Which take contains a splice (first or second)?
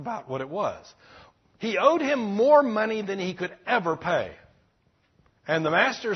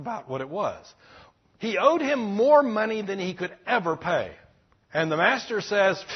second